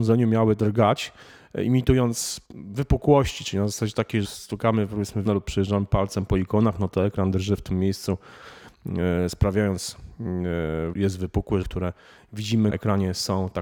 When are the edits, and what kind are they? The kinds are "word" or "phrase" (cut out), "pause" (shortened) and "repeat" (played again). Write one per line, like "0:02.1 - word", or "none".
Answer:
0:02.4 - pause
0:04.2 - word
0:05.3 - word
0:10.9 - phrase
0:11.6 - phrase
0:12.7 - word